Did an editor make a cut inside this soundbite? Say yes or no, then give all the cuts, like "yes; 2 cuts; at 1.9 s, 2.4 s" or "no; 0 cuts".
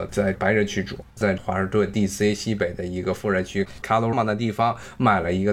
yes; 2 cuts; at 1.1 s, 4.1 s